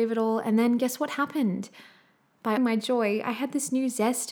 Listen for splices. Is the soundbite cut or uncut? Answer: cut